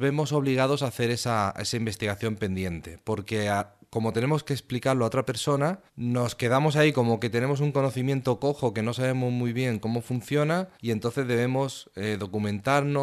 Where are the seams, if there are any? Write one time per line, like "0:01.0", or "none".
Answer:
0:05.9
0:10.7